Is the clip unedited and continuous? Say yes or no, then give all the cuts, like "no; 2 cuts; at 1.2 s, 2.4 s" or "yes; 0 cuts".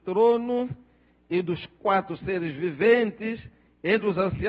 yes; 0 cuts